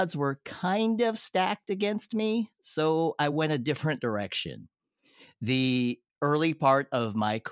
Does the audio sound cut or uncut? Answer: uncut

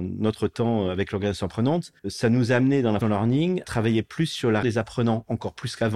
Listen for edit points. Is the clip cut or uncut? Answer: cut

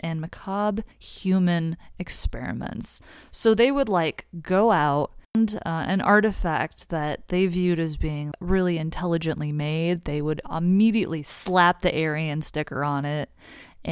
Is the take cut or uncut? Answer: cut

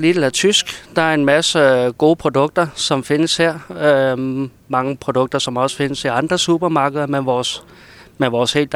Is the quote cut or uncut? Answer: uncut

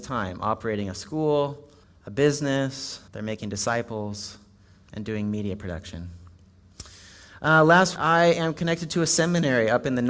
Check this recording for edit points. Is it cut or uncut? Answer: cut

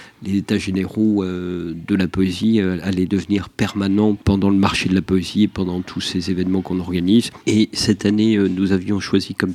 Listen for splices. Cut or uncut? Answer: uncut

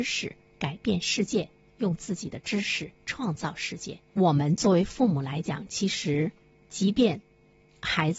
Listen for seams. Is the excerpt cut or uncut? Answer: cut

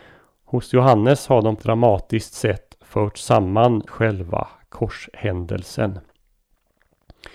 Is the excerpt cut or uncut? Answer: cut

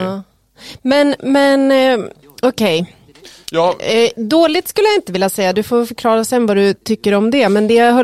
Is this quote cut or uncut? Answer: uncut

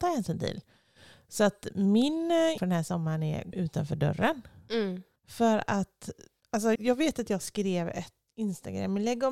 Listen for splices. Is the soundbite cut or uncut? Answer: cut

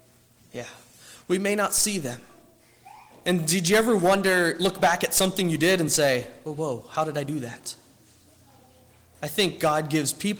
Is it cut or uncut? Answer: uncut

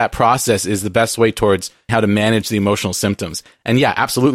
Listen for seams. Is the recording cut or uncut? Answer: cut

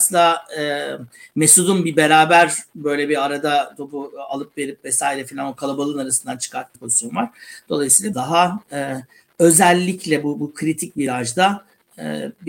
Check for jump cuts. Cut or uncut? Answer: cut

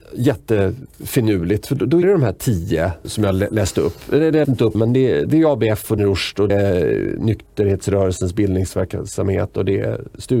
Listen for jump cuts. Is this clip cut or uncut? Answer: cut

